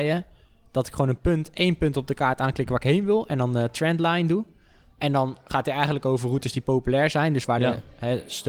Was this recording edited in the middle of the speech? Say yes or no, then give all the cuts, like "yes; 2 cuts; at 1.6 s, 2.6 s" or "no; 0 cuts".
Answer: no; 0 cuts